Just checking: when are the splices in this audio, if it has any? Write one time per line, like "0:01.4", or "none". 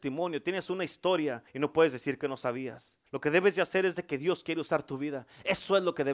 0:01.5
0:03.1